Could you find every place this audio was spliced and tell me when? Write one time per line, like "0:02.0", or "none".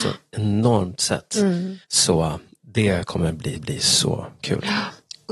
0:01.8
0:03.6